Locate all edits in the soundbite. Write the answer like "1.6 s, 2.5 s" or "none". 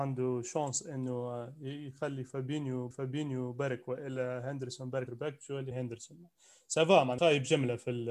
2.9 s, 5.1 s, 5.7 s, 7.2 s